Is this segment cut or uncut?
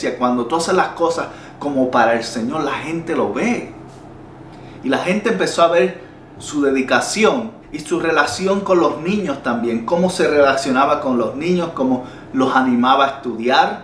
cut